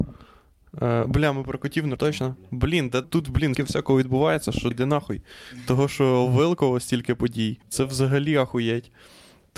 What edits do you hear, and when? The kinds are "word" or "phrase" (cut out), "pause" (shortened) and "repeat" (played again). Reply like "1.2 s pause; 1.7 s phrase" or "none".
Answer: 2.0 s word; 3.0 s word; 3.5 s word; 4.7 s word; 7.6 s pause